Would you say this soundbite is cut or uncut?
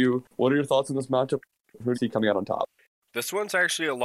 cut